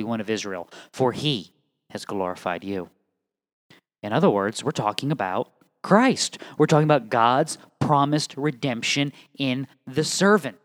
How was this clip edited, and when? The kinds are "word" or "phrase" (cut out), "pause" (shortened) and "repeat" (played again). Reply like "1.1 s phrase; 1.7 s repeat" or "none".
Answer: none